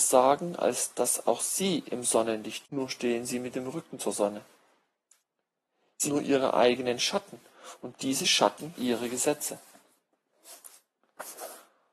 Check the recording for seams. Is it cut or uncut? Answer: cut